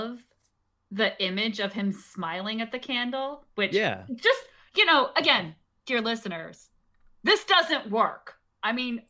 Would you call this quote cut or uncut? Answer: uncut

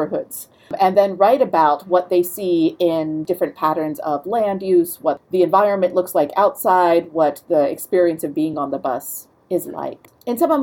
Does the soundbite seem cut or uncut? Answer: uncut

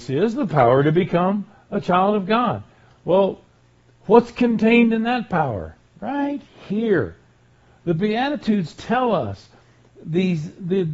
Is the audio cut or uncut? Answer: uncut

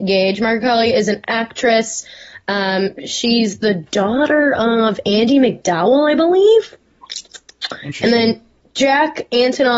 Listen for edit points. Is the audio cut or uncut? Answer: uncut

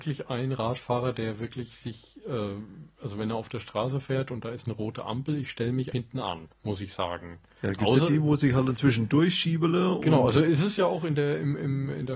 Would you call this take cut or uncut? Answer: cut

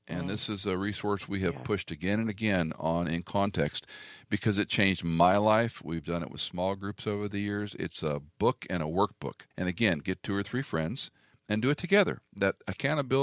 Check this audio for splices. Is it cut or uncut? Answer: cut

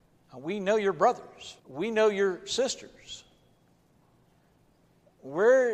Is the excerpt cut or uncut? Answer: cut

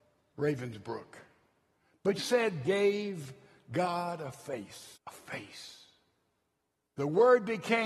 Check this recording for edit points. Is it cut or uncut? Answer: cut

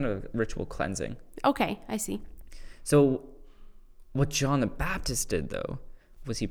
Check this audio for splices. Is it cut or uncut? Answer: uncut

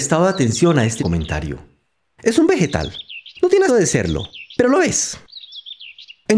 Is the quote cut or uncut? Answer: cut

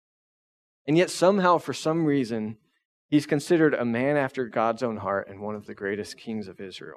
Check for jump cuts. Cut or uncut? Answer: uncut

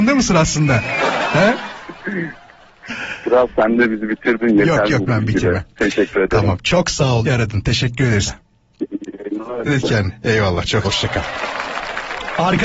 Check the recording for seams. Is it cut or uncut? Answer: cut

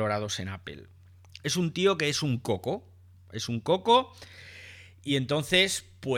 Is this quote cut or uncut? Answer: uncut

